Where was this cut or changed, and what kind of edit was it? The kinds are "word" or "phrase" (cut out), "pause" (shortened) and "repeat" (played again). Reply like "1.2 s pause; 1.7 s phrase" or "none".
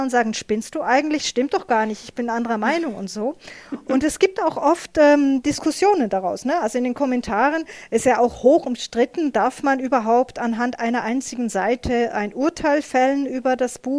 none